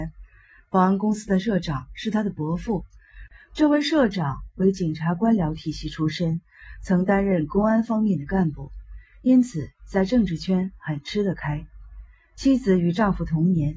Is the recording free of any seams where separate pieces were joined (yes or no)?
yes